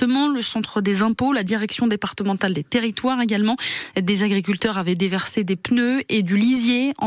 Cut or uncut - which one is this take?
uncut